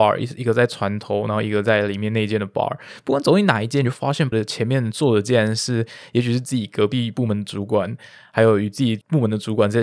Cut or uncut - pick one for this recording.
cut